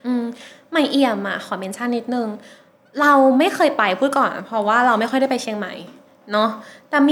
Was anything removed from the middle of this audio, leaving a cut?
no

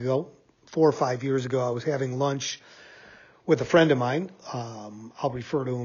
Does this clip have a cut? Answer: no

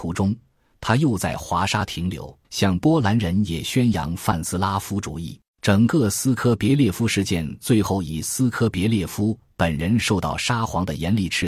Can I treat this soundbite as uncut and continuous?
no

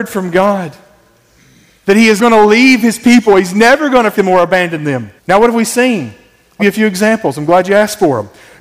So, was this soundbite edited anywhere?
yes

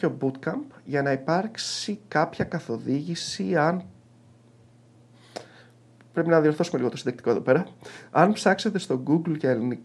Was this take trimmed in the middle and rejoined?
no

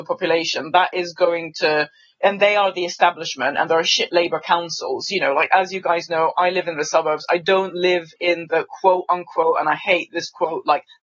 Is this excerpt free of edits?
yes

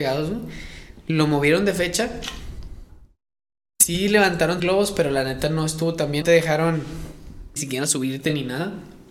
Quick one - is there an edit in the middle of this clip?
yes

